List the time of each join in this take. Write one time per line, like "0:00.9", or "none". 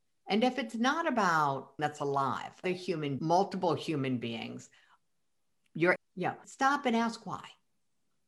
0:01.8
0:02.6
0:03.2
0:06.0
0:06.4